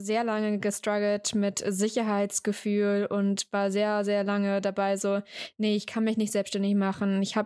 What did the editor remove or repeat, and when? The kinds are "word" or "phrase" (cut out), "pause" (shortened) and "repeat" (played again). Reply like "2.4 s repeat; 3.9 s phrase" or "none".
none